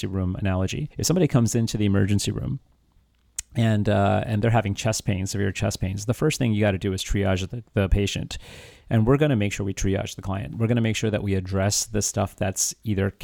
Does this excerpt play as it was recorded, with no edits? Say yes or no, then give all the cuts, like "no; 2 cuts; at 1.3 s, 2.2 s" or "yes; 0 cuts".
no; 2 cuts; at 0.9 s, 7.7 s